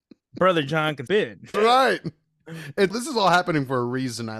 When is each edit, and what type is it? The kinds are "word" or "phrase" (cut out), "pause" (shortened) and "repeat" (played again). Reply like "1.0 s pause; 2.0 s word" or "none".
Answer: 1.1 s word; 1.5 s word; 2.9 s word